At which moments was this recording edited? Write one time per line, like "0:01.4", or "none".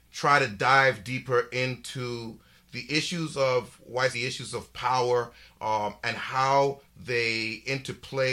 0:04.1